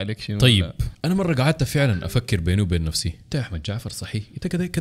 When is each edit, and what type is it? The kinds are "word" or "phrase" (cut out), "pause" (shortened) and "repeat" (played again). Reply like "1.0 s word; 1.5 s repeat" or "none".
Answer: 3.3 s word